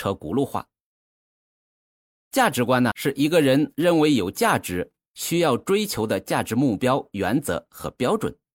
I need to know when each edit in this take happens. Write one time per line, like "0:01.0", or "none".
0:02.9

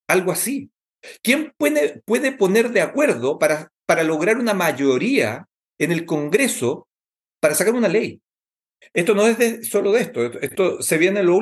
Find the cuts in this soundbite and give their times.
none

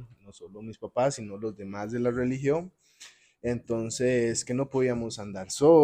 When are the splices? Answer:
none

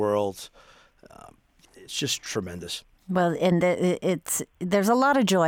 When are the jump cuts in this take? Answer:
0:01.6

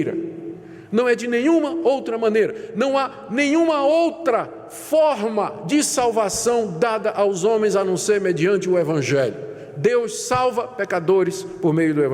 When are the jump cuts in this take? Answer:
none

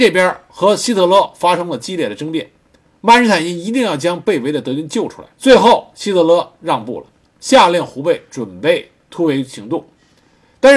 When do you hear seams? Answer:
0:05.3

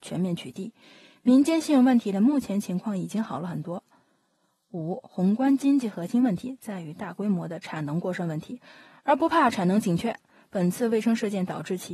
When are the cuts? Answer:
none

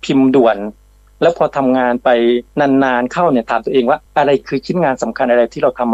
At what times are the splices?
0:02.5
0:04.1

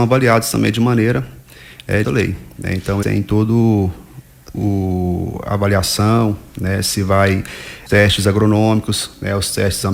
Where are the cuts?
0:02.0
0:03.0
0:04.5
0:07.9

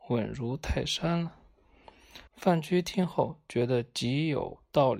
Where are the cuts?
0:02.3

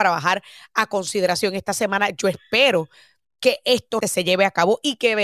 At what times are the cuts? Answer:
0:04.0

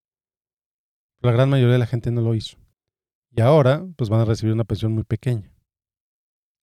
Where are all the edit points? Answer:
0:02.7

